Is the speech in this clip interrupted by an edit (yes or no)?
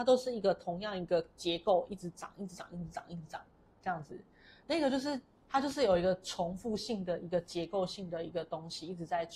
no